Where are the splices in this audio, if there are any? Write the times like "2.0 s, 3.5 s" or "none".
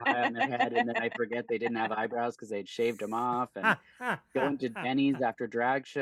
none

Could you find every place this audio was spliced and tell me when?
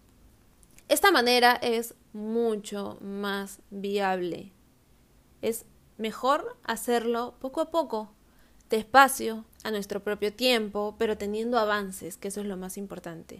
5.7 s, 9.5 s

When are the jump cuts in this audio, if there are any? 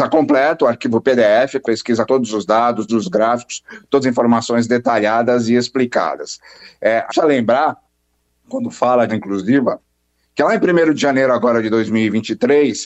1.6 s, 2.1 s, 2.9 s, 4.0 s, 7.1 s, 9.1 s

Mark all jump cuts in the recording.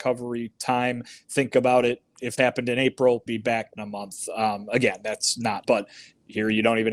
2.4 s, 3.3 s, 3.8 s, 5.6 s

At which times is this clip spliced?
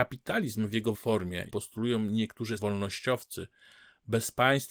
0.9 s, 1.5 s, 2.6 s

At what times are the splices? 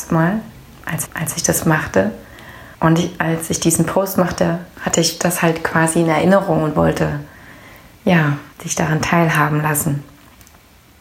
1.1 s, 2.7 s, 8.5 s

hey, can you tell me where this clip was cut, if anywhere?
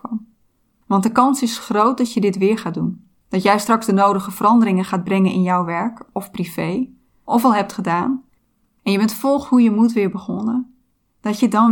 none

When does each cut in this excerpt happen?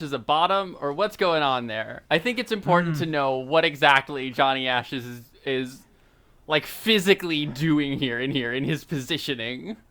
2.1 s, 8.3 s

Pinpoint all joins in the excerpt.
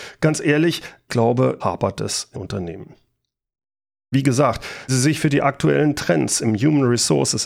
1.1 s, 1.6 s, 2.3 s, 4.9 s

